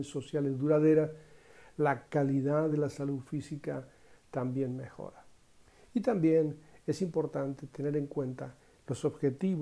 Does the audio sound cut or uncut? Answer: uncut